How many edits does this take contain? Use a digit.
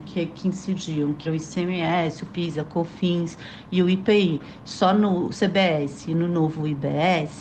1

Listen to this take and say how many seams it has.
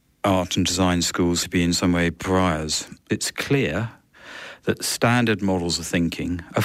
1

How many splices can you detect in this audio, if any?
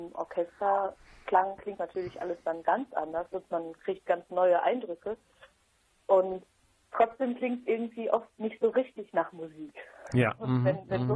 1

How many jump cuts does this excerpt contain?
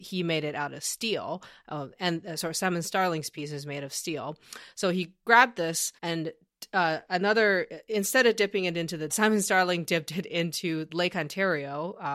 2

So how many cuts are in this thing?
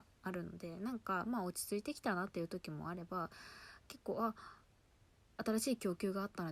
0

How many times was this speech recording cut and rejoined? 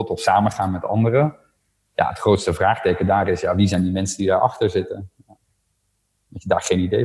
0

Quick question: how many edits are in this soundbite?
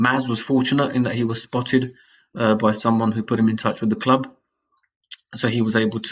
0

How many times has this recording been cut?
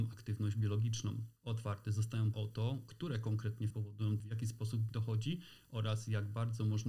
5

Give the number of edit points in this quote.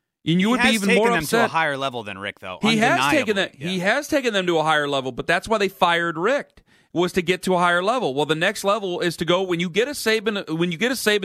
0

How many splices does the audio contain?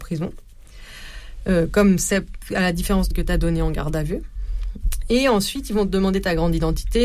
1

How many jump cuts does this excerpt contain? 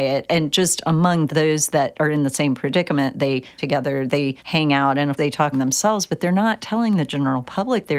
5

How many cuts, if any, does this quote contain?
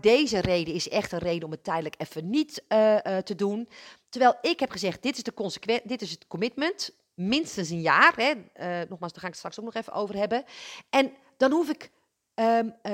0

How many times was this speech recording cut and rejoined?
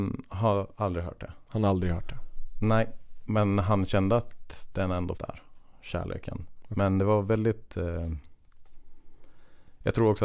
1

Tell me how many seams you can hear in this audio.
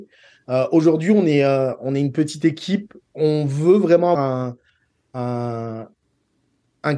2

